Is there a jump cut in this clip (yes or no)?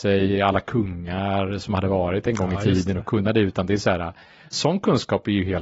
yes